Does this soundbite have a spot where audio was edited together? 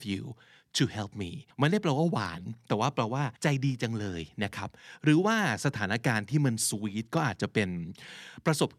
yes; 2 cuts; at 1.5 s, 3.4 s

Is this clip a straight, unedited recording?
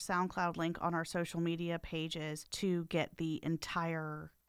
yes; 0 cuts

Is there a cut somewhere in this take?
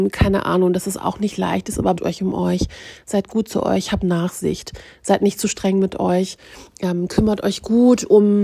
yes; 1 cut; at 2.0 s

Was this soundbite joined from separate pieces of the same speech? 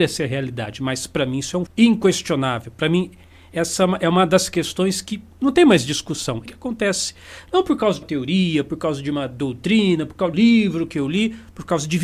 yes; 4 cuts; at 1.7 s, 6.5 s, 8.0 s, 10.3 s

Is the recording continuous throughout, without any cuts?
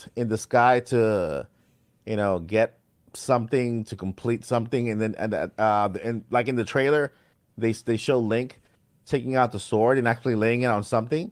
yes; 0 cuts

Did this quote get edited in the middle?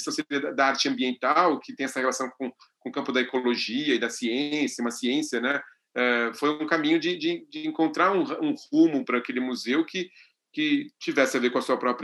no; 0 cuts

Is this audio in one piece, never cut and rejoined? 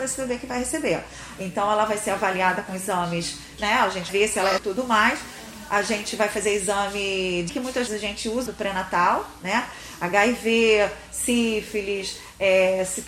no; 6 cuts; at 3.6 s, 4.1 s, 4.6 s, 7.5 s, 7.9 s, 8.5 s

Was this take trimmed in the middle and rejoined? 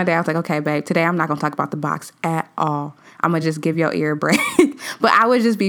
no; 0 cuts

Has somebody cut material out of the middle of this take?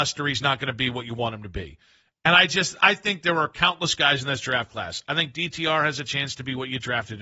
no; 0 cuts

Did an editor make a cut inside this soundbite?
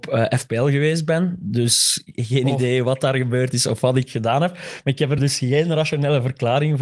no; 0 cuts

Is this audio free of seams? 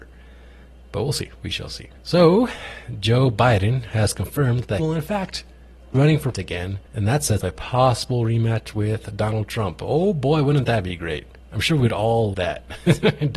no; 9 cuts; at 1.3 s, 2.0 s, 4.8 s, 5.9 s, 6.3 s, 6.9 s, 7.4 s, 11.4 s, 12.3 s

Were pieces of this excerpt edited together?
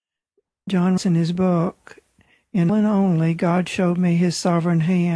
yes; 2 cuts; at 1.0 s, 2.7 s

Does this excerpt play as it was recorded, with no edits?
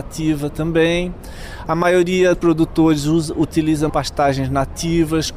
no; 2 cuts; at 2.3 s, 3.9 s

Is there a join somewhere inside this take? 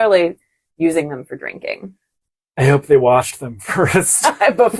no; 0 cuts

